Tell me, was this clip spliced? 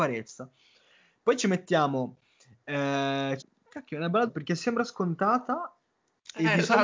yes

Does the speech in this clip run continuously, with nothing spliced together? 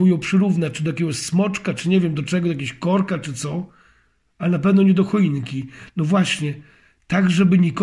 yes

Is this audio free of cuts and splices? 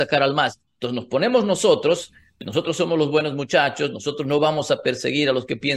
yes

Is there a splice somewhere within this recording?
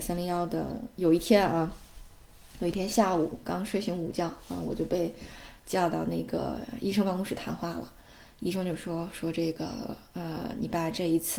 no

